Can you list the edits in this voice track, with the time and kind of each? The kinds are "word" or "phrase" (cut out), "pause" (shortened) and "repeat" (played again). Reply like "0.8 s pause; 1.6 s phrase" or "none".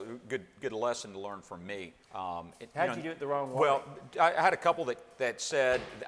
2.0 s pause